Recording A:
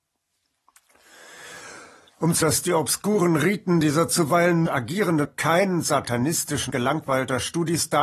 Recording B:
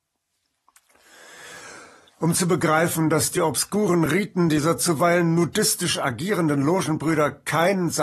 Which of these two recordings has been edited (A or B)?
A